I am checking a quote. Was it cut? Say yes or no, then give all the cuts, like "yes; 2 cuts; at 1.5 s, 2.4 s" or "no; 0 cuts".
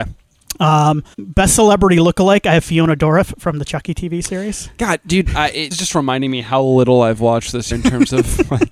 yes; 3 cuts; at 1.1 s, 5.7 s, 7.7 s